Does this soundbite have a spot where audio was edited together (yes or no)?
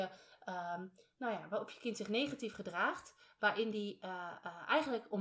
no